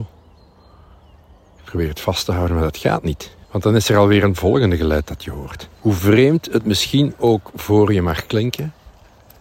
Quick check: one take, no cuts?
no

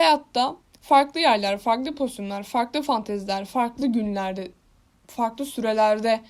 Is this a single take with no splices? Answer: yes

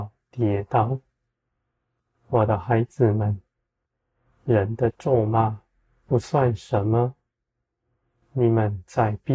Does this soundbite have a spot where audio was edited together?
no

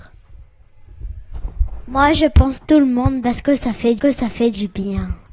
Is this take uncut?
no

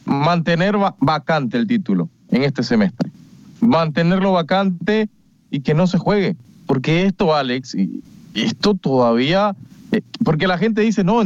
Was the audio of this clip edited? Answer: no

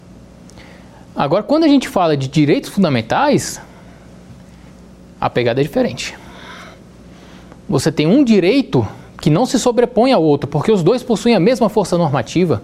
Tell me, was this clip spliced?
yes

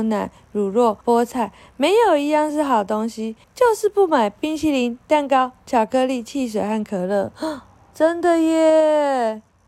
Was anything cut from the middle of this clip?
yes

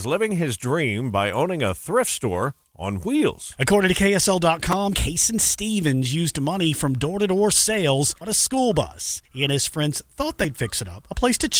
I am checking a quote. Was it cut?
yes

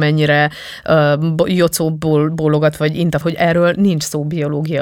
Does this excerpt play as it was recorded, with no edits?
no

